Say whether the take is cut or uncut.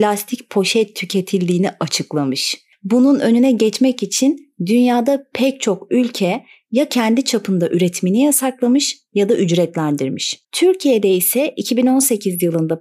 uncut